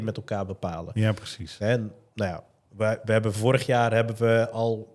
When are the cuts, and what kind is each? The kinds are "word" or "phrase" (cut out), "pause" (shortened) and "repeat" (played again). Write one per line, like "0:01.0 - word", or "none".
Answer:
none